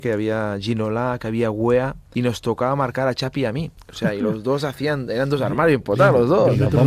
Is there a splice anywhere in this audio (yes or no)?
no